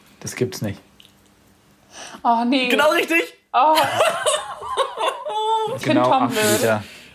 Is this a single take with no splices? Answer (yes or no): no